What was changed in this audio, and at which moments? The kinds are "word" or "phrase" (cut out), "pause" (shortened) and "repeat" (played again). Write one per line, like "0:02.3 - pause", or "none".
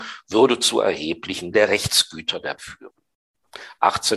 0:01.5 - word
0:02.6 - word